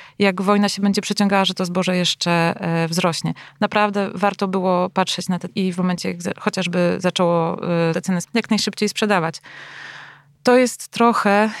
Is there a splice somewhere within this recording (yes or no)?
yes